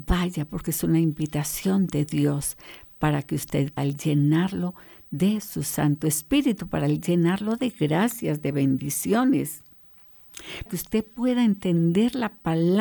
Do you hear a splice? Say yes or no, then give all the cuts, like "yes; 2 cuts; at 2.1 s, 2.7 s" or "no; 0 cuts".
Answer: yes; 2 cuts; at 3.8 s, 10.7 s